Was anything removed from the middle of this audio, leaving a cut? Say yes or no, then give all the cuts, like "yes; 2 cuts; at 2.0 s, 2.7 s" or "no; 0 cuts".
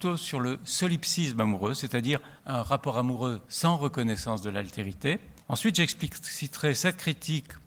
yes; 2 cuts; at 2.4 s, 5.4 s